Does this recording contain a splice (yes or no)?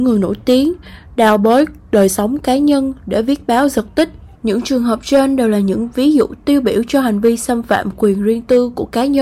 yes